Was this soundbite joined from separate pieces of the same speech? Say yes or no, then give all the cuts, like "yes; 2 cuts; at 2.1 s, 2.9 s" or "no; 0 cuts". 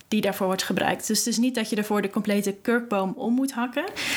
no; 0 cuts